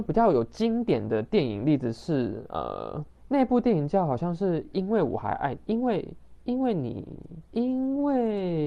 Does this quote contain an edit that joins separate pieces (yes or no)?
yes